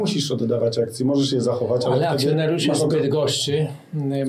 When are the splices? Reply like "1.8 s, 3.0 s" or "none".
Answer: none